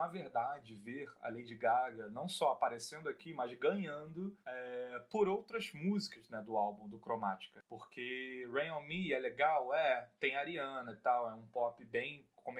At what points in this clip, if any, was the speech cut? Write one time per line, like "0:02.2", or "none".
0:04.4

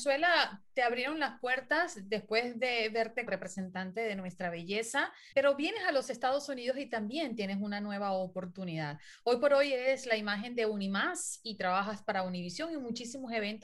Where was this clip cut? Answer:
0:03.3
0:05.3

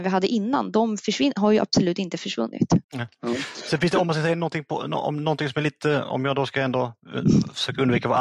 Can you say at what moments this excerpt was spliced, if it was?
0:02.8

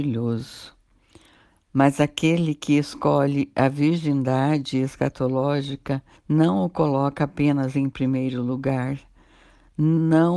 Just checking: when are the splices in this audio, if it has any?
0:06.2

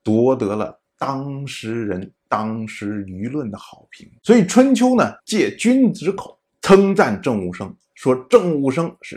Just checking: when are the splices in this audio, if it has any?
0:02.2
0:04.2
0:05.2
0:06.5

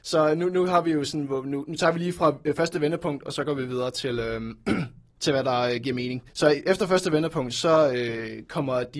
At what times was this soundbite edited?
0:06.3

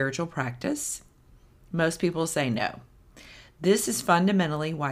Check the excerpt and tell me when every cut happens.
none

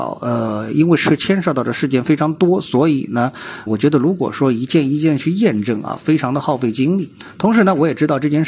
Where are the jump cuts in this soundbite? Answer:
0:03.7

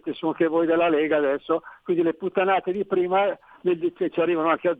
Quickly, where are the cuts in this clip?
none

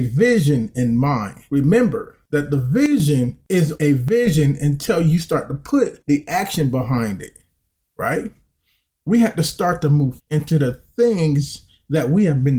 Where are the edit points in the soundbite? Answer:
0:03.8
0:10.2

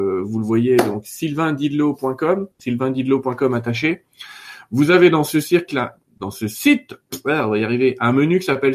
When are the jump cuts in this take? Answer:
0:02.5

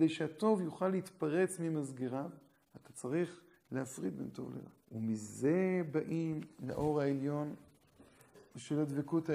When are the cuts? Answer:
0:04.8

